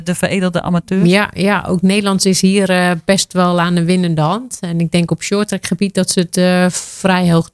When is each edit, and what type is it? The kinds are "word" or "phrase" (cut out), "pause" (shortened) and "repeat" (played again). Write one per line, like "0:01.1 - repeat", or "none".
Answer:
none